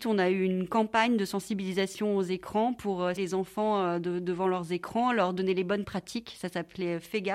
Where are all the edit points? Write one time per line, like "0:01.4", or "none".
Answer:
0:03.2

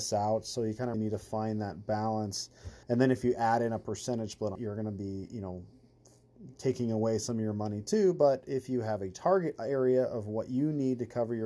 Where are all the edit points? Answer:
0:00.9
0:02.8
0:04.5

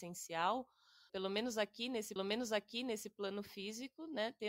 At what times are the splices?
0:01.1
0:02.2

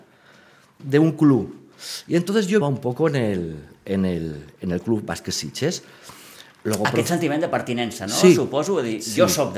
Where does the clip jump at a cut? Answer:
0:02.6

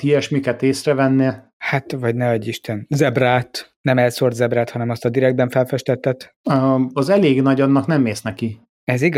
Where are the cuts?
none

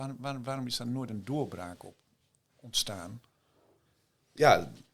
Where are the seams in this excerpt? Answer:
none

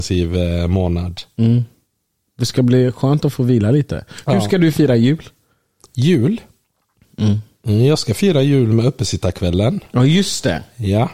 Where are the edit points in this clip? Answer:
none

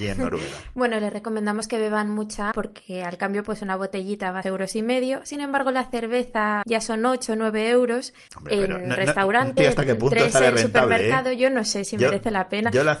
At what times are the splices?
0:02.5
0:04.4
0:06.6
0:08.3
0:09.6

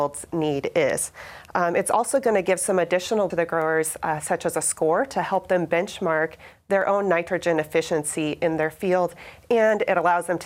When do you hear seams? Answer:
0:03.3

